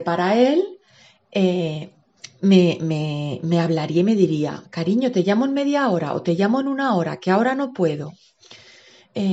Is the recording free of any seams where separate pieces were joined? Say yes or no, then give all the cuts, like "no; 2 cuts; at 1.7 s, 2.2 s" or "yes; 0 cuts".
yes; 0 cuts